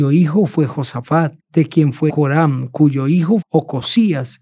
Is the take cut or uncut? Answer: cut